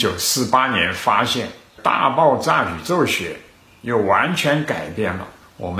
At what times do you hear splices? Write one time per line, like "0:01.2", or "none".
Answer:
none